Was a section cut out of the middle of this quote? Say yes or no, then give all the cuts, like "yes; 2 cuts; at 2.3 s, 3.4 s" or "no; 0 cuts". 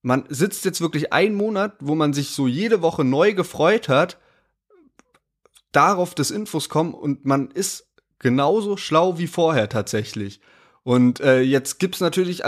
no; 0 cuts